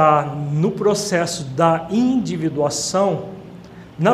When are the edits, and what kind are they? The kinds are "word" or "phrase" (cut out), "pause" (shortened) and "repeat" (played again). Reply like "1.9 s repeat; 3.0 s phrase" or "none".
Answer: none